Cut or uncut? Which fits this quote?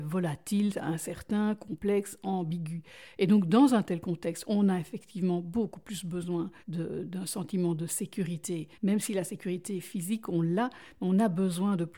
cut